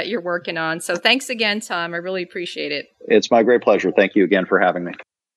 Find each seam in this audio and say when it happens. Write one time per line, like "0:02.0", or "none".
0:02.9